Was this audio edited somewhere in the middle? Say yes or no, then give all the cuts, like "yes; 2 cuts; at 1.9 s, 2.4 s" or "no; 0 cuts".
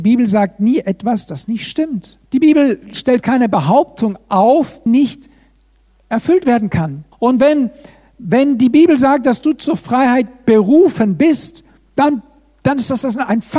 yes; 3 cuts; at 2.2 s, 4.9 s, 7.1 s